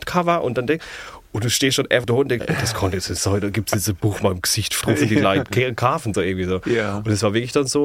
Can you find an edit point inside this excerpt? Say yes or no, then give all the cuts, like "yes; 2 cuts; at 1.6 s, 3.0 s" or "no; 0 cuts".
yes; 5 cuts; at 2.0 s, 2.4 s, 4.2 s, 4.8 s, 6.1 s